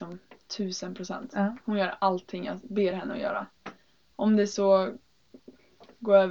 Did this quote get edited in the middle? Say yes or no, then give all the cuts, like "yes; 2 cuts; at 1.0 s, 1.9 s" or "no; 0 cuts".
no; 0 cuts